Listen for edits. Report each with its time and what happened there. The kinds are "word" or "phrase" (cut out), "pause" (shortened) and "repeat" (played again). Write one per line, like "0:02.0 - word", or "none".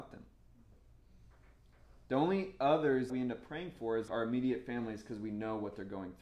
0:03.1 - word
0:04.1 - word